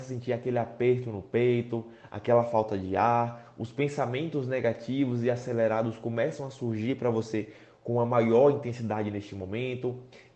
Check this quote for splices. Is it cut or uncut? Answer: uncut